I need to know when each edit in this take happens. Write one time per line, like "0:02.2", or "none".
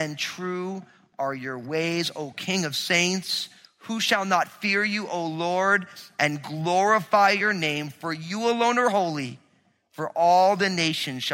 none